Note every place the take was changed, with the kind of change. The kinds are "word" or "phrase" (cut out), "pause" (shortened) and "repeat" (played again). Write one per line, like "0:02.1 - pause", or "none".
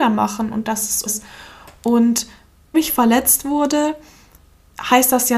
0:01.1 - word
0:02.7 - word